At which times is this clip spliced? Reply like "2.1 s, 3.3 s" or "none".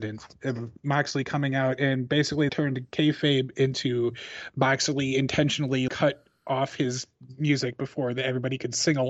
2.5 s, 5.9 s